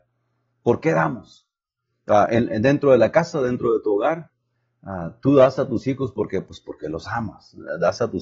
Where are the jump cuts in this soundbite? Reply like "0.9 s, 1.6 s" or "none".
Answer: none